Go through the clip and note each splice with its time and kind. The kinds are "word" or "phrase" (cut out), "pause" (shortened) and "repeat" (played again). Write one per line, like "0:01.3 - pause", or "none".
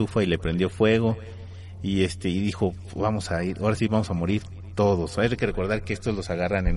none